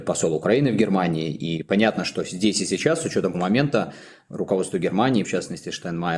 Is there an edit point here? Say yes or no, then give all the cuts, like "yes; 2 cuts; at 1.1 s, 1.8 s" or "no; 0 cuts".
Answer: yes; 2 cuts; at 3.3 s, 5.2 s